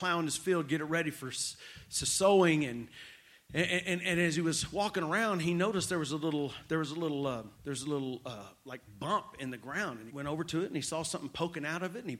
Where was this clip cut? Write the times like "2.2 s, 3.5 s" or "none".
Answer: 7.5 s, 10.1 s